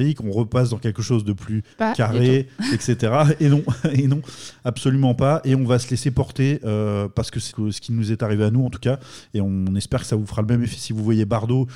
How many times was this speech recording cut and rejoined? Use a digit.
2